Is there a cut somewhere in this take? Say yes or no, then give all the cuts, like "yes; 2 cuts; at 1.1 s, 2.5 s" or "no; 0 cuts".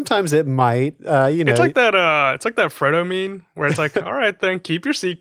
no; 0 cuts